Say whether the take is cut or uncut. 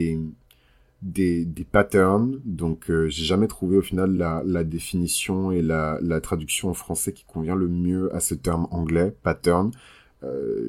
uncut